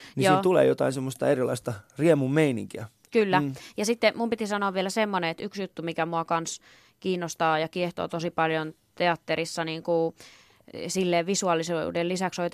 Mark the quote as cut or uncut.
uncut